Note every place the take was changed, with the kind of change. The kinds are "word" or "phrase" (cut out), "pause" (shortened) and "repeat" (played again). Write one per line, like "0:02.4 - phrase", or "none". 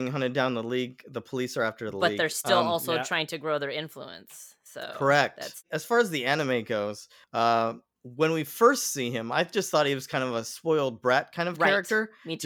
none